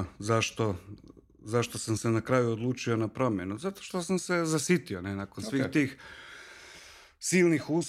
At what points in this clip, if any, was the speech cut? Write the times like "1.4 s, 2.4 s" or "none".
none